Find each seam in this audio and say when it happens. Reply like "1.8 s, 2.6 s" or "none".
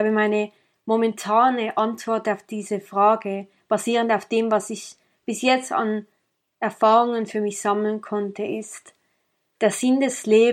none